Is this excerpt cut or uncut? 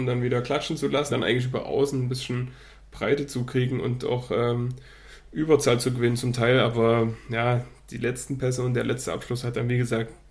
cut